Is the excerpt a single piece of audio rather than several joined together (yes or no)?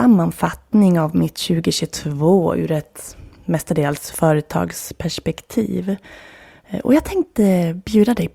yes